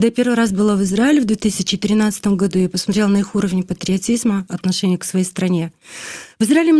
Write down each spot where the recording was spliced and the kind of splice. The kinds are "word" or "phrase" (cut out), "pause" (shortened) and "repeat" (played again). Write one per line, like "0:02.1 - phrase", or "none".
none